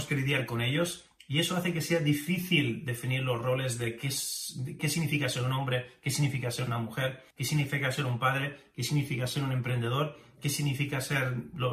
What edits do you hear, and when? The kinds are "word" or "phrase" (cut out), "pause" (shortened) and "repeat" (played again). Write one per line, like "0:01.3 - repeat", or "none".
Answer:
0:04.8 - word
0:07.3 - pause